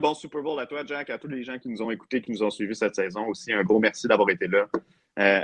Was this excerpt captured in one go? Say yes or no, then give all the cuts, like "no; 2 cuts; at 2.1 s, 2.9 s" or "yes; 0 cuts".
yes; 0 cuts